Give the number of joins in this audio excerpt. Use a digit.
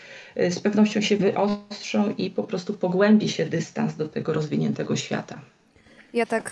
0